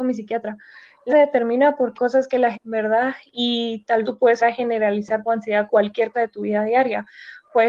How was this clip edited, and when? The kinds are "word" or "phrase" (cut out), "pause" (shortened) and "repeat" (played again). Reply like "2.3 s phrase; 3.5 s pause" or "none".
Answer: 1.1 s word; 2.0 s word; 2.5 s word; 4.0 s word; 4.4 s word; 5.3 s word; 5.7 s word; 6.1 s word